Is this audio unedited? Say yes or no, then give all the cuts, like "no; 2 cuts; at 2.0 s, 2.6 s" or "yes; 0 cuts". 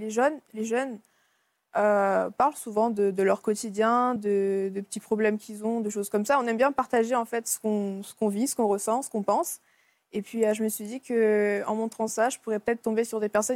yes; 0 cuts